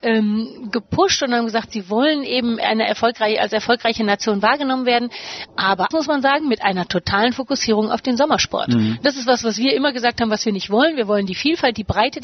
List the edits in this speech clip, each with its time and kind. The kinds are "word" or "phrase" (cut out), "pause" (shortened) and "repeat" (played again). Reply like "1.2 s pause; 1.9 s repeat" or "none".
5.9 s phrase

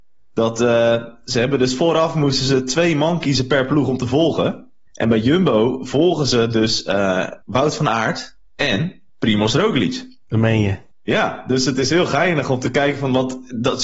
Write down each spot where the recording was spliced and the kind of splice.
4.9 s pause; 7.4 s pause; 9.1 s pause; 10.9 s pause

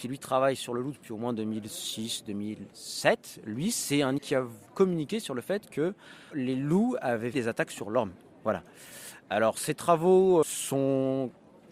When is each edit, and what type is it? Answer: 4.2 s word; 4.7 s word; 6.3 s word; 7.3 s word; 10.4 s word

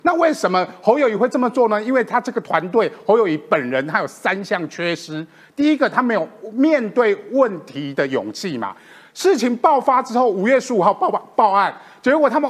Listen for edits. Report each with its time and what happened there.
none

